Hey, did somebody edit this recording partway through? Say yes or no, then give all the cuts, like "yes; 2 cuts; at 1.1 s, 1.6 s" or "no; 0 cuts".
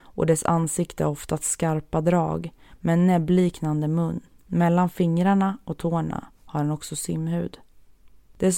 yes; 1 cut; at 4.2 s